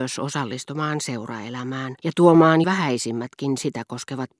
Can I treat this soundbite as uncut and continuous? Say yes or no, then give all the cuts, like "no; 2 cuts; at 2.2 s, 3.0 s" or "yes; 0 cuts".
no; 2 cuts; at 2.0 s, 2.6 s